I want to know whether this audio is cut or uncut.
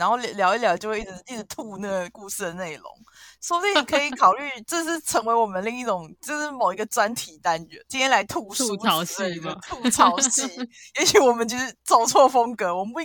cut